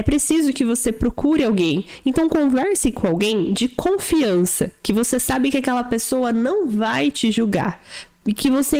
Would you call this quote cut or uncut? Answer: uncut